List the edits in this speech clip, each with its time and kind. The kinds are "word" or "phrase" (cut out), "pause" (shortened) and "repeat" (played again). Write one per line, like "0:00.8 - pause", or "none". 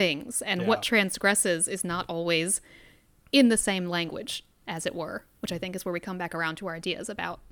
none